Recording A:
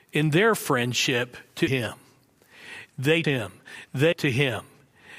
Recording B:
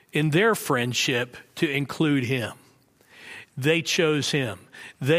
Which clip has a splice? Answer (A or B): A